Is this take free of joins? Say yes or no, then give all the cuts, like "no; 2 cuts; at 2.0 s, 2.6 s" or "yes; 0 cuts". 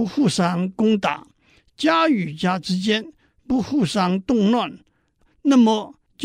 yes; 0 cuts